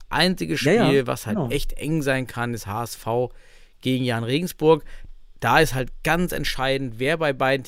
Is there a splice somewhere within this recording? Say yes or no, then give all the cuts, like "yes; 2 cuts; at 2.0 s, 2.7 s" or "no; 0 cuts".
no; 0 cuts